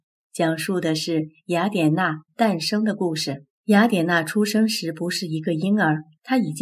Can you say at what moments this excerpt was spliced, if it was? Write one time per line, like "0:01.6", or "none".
0:03.5